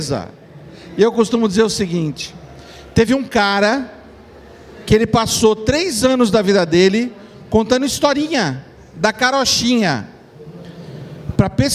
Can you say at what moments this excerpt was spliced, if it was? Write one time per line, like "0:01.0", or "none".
none